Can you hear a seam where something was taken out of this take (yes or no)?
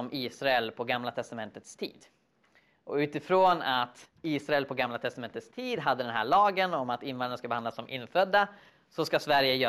no